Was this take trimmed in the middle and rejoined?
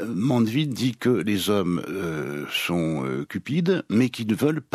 no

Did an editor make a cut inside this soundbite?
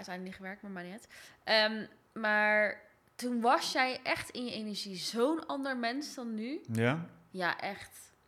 no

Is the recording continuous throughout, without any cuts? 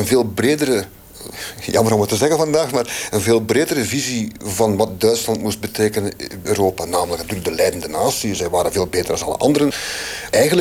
no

